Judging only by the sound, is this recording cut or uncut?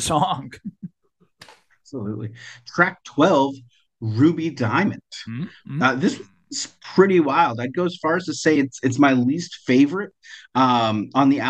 uncut